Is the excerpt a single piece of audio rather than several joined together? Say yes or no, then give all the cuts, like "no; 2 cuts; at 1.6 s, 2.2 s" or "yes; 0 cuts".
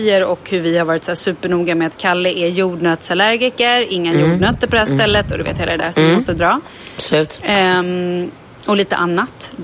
yes; 0 cuts